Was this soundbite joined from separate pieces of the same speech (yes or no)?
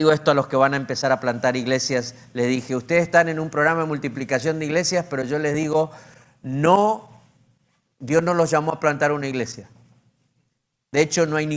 no